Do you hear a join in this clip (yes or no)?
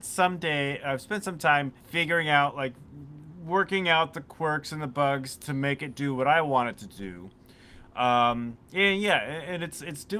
yes